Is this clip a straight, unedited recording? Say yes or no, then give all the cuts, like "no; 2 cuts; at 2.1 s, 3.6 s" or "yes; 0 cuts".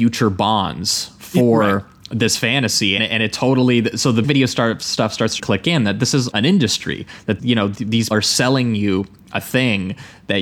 no; 6 cuts; at 3.0 s, 4.2 s, 5.4 s, 6.3 s, 7.4 s, 8.1 s